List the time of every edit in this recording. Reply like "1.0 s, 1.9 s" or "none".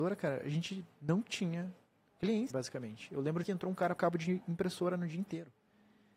2.5 s, 3.4 s, 4.0 s